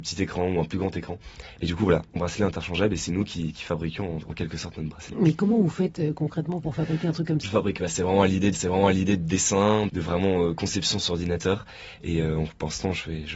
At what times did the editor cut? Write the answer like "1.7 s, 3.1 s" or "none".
2.2 s, 7.4 s, 8.5 s, 9.9 s

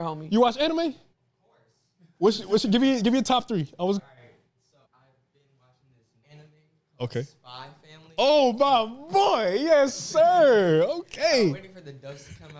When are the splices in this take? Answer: 1.1 s, 4.0 s, 4.8 s, 6.2 s

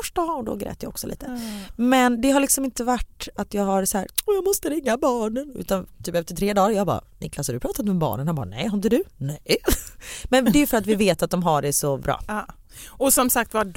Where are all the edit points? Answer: 12.0 s

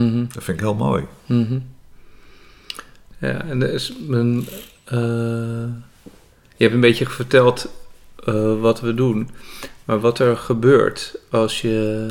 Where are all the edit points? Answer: none

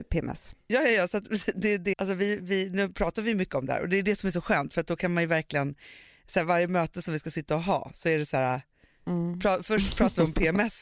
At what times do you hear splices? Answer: 1.9 s

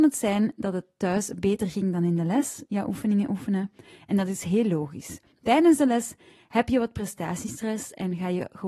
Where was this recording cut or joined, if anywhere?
none

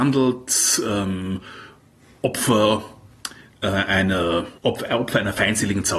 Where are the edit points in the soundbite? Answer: 4.6 s

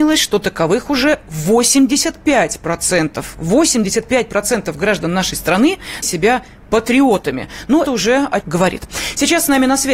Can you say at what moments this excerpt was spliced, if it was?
6.0 s, 7.9 s, 8.4 s

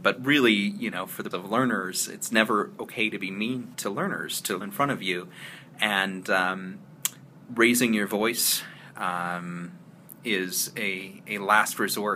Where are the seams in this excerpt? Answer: 1.3 s, 3.7 s, 4.6 s, 7.4 s

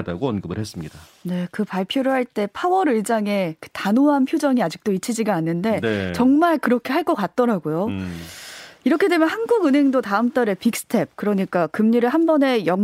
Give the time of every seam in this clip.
none

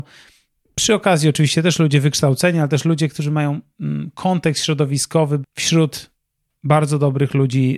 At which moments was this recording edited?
5.4 s

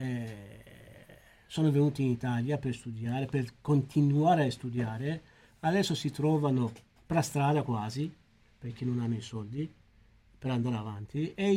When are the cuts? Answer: none

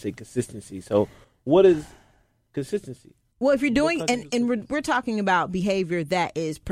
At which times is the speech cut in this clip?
none

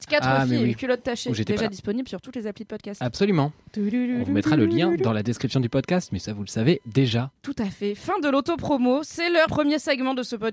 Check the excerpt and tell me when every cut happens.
9.5 s

